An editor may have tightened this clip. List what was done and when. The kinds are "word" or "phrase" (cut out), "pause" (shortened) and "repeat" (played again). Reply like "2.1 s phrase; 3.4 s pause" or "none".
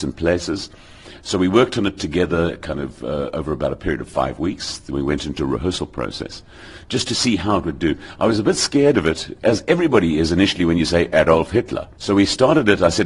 none